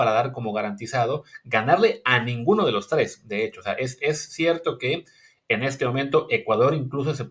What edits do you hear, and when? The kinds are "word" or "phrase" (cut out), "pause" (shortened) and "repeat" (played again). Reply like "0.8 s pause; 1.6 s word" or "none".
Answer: none